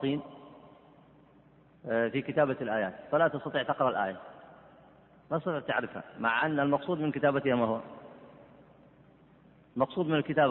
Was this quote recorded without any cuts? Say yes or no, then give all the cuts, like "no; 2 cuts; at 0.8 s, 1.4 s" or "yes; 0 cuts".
yes; 0 cuts